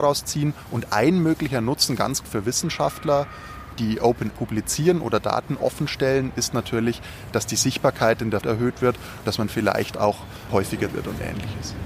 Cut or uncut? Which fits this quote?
cut